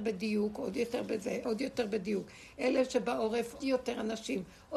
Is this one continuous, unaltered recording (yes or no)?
no